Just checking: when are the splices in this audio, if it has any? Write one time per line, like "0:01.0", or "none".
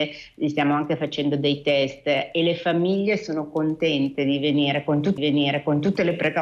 0:05.2